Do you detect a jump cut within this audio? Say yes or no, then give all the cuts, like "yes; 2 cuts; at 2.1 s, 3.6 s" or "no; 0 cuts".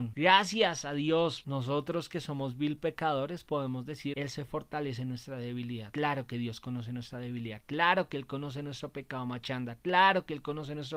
no; 0 cuts